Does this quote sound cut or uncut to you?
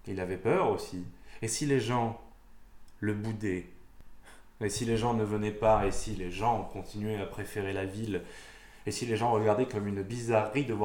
uncut